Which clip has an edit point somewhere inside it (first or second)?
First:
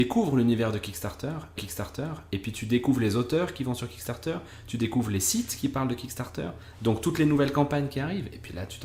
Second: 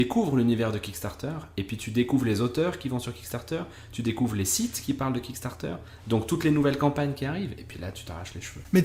first